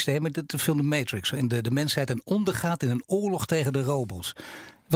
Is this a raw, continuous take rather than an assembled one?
yes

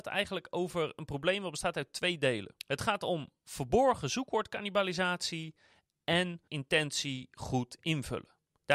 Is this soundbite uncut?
no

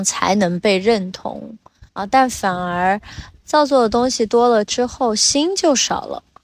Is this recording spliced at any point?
yes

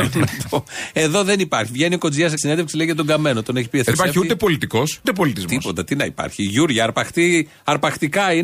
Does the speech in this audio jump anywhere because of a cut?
yes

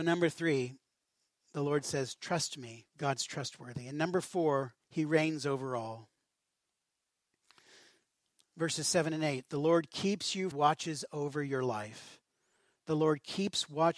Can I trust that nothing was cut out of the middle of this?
no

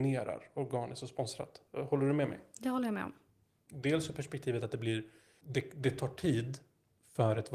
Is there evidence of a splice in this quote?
no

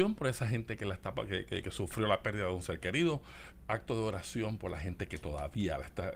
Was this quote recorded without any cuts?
no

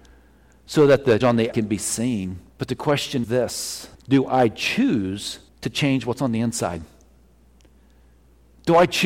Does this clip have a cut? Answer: yes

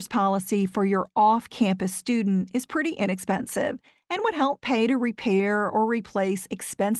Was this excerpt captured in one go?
yes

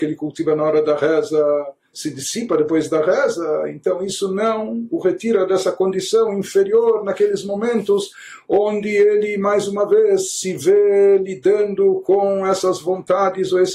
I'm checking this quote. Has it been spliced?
no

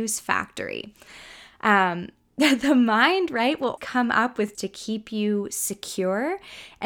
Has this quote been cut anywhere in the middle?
yes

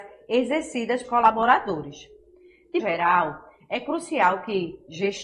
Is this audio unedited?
no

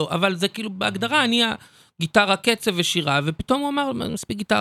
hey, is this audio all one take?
yes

